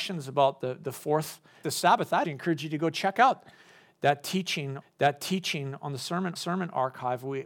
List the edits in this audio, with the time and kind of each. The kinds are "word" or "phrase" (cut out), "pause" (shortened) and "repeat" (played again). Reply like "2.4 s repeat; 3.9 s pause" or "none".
1.6 s phrase; 2.2 s word; 4.8 s repeat; 6.4 s repeat